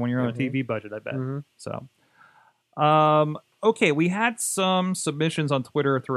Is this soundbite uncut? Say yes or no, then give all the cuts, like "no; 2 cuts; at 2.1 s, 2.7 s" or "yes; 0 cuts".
yes; 0 cuts